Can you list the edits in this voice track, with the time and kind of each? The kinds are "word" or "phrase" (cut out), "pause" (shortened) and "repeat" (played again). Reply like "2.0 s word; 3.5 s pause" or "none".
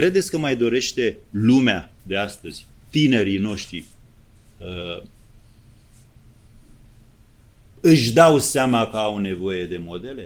2.0 s pause